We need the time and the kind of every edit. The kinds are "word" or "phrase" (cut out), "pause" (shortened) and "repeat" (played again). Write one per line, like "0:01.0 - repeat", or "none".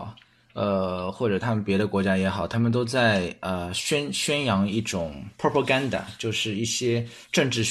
none

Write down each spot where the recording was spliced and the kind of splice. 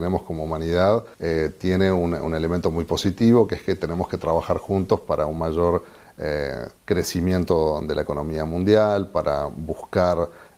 0:01.1 - pause
0:06.8 - pause

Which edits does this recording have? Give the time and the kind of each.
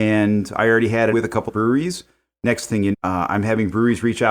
0:01.1 - word
0:01.5 - word
0:02.9 - word

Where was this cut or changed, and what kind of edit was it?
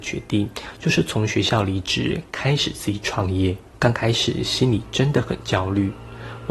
none

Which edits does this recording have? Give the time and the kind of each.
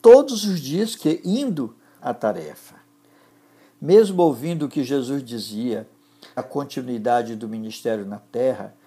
0:01.0 - phrase
0:02.0 - word
0:06.4 - word

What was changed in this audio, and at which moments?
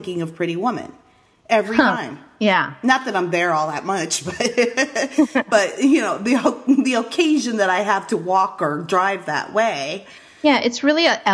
none

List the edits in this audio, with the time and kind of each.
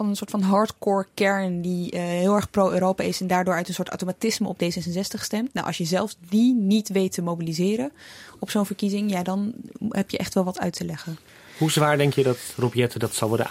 none

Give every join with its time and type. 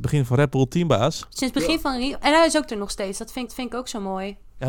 0:02.7 - word
0:03.5 - repeat

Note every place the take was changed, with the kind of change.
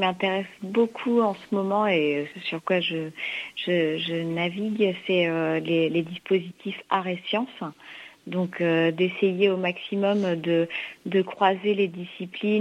0:02.3 - word

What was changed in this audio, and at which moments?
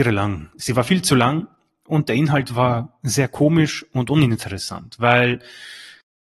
none

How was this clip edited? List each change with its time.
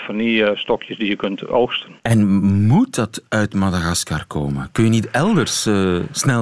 0:02.0 - pause

